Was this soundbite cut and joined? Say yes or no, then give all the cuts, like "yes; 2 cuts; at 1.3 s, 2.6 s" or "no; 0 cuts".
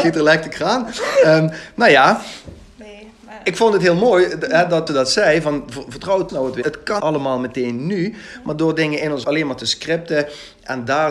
yes; 5 cuts; at 4.9 s, 6.3 s, 6.6 s, 7.0 s, 9.2 s